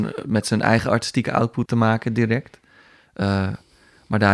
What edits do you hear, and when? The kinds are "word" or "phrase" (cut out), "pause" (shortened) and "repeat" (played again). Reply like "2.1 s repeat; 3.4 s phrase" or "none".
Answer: 1.7 s word